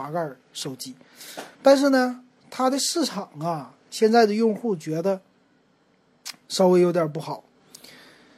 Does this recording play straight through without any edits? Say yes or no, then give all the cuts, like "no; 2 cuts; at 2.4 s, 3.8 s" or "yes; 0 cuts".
no; 1 cut; at 1.5 s